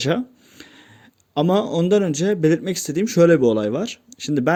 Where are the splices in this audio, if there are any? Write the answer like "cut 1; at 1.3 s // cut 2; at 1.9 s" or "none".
none